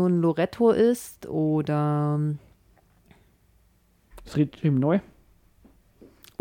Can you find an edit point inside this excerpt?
no; 0 cuts

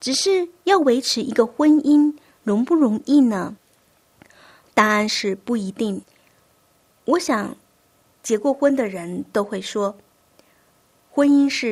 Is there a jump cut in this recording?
no; 0 cuts

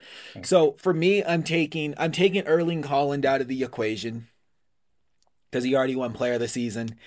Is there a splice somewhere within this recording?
no; 0 cuts

